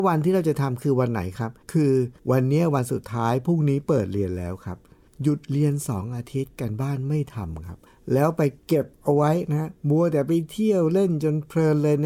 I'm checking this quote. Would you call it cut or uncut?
cut